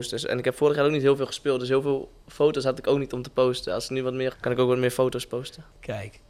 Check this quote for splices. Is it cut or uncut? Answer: cut